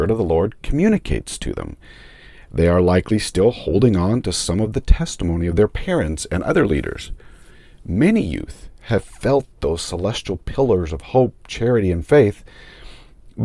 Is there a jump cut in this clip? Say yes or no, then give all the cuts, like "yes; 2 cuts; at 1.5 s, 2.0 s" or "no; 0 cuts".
no; 0 cuts